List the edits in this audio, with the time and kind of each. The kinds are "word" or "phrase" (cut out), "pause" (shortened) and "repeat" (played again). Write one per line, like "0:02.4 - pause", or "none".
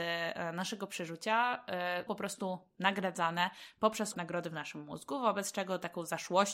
0:02.1 - word
0:04.1 - word